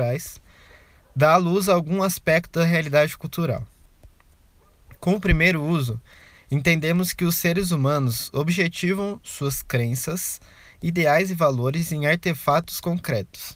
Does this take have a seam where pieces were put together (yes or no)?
no